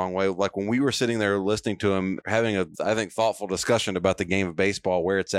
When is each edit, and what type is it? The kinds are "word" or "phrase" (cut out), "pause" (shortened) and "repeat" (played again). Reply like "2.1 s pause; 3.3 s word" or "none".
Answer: 2.2 s word; 2.7 s word